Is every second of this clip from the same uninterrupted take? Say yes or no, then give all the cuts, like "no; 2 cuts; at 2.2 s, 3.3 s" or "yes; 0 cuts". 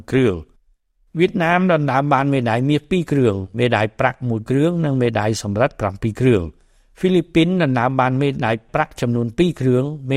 yes; 0 cuts